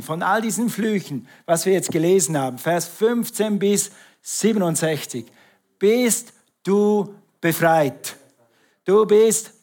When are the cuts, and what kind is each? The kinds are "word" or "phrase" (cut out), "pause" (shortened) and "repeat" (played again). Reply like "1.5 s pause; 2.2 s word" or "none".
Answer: none